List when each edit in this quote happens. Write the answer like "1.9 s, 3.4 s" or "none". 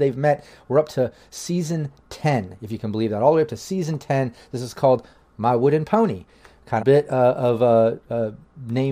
6.8 s